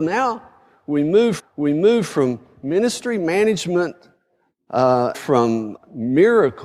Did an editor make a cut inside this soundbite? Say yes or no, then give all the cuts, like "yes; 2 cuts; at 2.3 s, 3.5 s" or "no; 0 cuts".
yes; 3 cuts; at 1.4 s, 5.1 s, 5.8 s